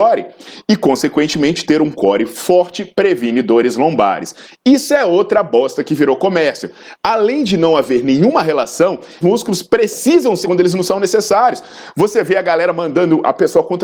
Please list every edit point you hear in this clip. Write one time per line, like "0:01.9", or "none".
0:09.2
0:10.4